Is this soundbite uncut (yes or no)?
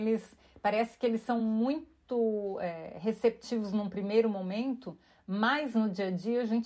yes